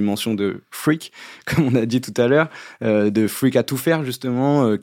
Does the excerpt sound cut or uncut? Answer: uncut